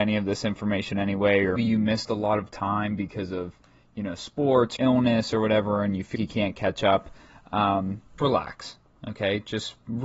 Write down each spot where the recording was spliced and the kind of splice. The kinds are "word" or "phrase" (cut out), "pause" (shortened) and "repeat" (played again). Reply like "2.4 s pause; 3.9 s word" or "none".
1.6 s word; 4.8 s word; 6.1 s word; 8.2 s word